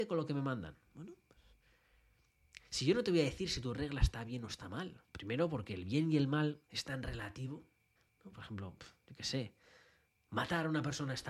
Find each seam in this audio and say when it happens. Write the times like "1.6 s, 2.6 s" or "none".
5.0 s, 6.6 s, 8.0 s